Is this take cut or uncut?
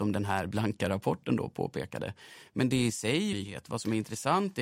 cut